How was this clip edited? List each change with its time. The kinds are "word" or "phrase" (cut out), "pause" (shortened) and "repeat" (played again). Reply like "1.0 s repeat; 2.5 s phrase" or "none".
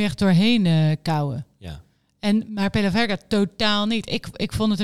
2.5 s word